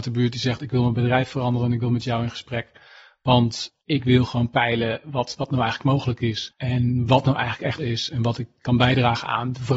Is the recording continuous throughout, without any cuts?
no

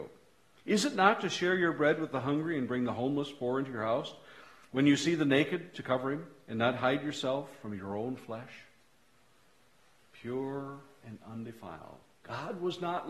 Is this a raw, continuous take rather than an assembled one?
yes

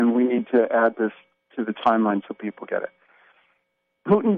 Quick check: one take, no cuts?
yes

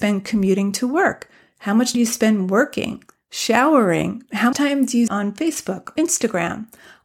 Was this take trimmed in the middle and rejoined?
yes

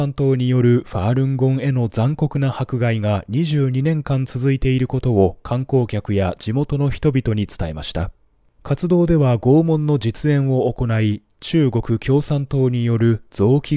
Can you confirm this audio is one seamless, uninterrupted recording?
yes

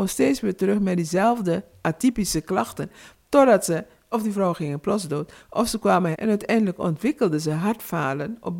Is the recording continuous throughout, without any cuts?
no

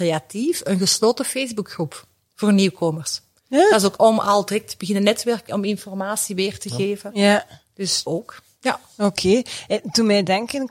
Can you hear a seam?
yes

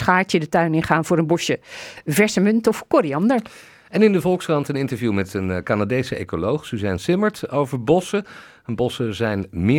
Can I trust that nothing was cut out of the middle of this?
yes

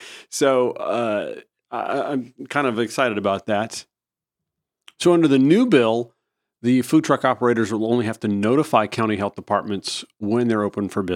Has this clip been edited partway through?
no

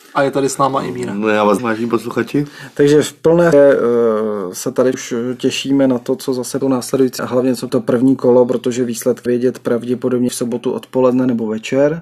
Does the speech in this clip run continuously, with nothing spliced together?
no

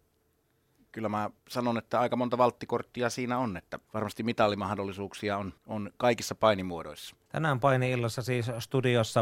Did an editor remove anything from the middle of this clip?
yes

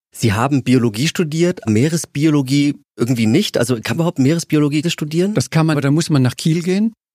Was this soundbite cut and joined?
yes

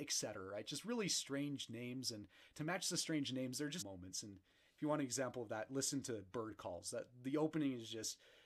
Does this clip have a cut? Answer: yes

